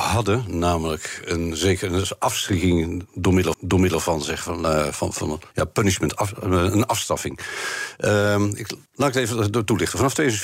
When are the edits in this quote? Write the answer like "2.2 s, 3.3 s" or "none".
3.5 s, 5.1 s, 5.5 s, 8.9 s